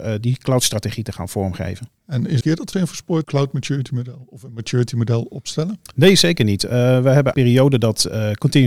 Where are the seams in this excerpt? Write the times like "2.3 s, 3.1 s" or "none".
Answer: 2.0 s, 2.4 s, 2.7 s, 3.2 s, 7.3 s